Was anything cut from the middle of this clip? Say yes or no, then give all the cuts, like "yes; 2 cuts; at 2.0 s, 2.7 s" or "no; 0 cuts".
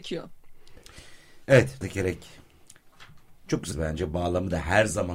yes; 2 cuts; at 1.8 s, 3.7 s